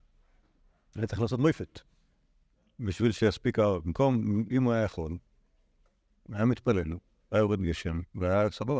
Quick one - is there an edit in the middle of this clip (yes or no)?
no